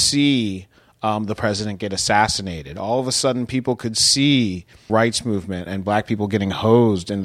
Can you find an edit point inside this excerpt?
yes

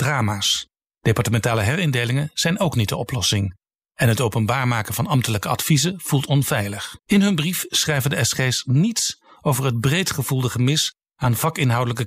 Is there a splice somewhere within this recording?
yes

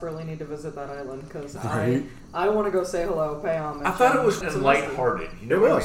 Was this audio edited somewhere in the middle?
yes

